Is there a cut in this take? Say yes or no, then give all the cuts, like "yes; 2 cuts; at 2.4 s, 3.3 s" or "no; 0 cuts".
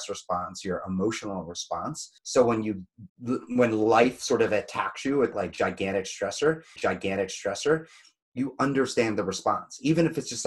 yes; 4 cuts; at 2.2 s, 3.1 s, 5.3 s, 6.8 s